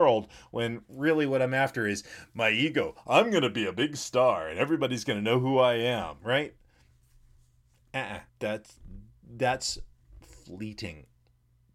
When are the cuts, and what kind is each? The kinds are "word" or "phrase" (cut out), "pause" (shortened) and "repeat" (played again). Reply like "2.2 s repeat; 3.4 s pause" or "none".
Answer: 8.3 s pause

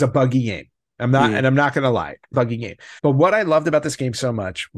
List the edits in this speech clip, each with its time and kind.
2.3 s phrase; 3.0 s pause

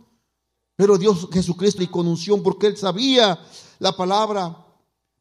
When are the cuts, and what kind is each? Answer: 1.8 s phrase

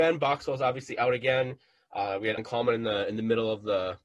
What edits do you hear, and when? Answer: 2.4 s word

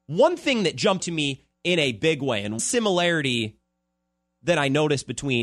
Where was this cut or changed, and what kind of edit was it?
1.0 s word; 2.6 s word

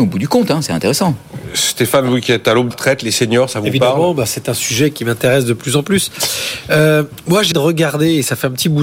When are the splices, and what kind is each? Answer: 2.7 s word; 7.5 s word

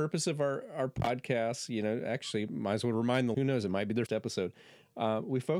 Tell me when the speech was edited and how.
3.3 s word; 4.1 s word

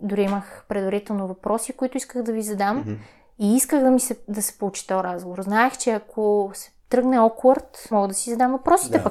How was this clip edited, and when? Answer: 7.9 s word

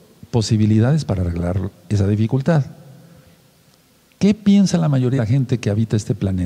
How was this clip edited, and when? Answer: 5.2 s word

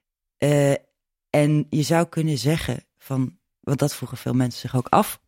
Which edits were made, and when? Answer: 3.6 s word

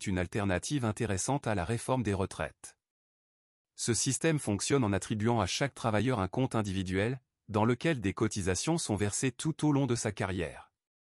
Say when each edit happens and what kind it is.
none

